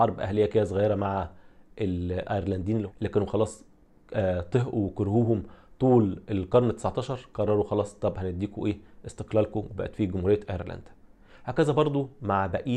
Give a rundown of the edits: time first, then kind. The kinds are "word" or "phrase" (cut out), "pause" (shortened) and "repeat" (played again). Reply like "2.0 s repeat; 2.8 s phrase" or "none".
none

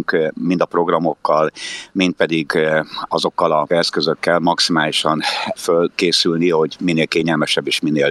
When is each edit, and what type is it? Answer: 3.7 s word

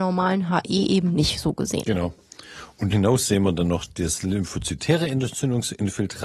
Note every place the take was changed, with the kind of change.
2.9 s word

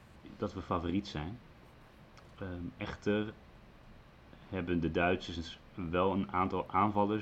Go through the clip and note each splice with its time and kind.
none

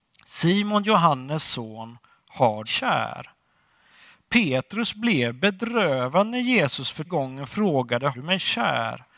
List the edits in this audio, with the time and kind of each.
2.7 s phrase; 7.0 s word; 8.1 s word

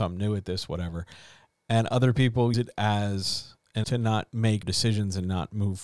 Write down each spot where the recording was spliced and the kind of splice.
2.5 s word; 3.8 s word; 4.6 s word

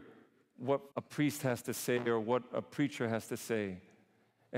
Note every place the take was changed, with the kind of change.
0.9 s pause

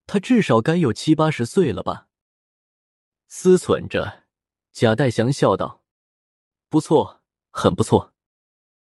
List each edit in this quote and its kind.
none

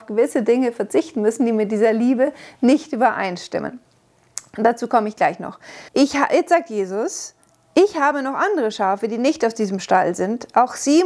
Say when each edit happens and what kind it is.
5.9 s pause

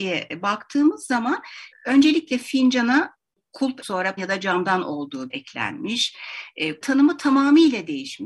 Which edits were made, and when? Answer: 1.7 s word; 3.8 s word; 4.2 s word; 5.3 s word; 6.8 s word

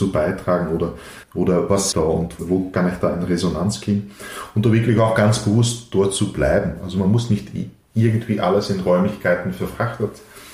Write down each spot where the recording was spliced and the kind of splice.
1.2 s pause; 1.9 s phrase; 2.4 s word

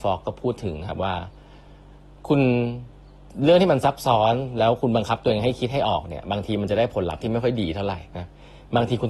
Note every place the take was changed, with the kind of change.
8.1 s pause

